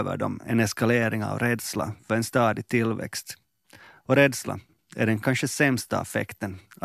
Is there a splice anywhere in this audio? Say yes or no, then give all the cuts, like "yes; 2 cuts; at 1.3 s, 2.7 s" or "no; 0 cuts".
no; 0 cuts